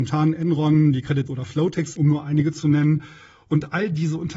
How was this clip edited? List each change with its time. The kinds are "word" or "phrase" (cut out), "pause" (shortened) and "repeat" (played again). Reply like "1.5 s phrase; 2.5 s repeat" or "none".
1.3 s word; 2.0 s word